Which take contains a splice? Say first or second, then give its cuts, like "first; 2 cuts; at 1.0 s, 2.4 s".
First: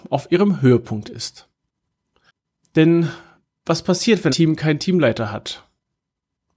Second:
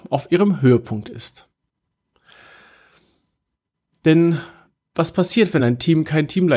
first; 2 cuts; at 2.3 s, 4.3 s